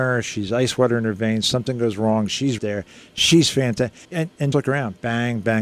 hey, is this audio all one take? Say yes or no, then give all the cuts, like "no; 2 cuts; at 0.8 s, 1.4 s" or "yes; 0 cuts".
no; 3 cuts; at 2.6 s, 4.0 s, 4.5 s